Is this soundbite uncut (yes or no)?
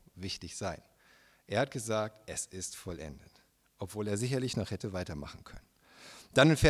yes